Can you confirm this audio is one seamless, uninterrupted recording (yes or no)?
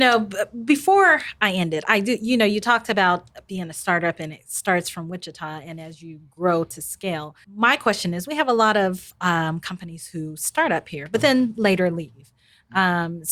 no